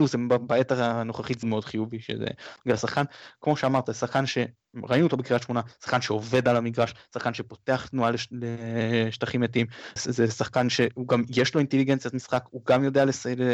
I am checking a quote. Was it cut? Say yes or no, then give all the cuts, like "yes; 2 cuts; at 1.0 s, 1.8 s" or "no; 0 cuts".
yes; 2 cuts; at 1.4 s, 10.0 s